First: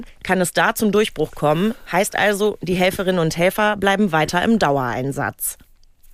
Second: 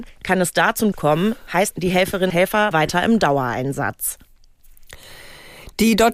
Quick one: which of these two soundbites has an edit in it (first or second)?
second